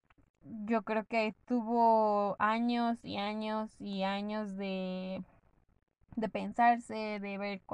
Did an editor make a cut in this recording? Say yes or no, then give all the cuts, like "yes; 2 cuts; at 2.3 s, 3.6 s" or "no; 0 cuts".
no; 0 cuts